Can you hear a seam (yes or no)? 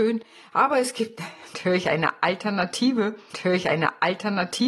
yes